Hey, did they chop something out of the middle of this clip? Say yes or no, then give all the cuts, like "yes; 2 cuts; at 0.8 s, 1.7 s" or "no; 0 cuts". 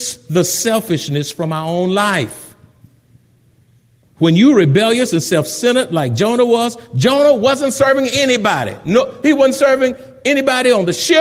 no; 0 cuts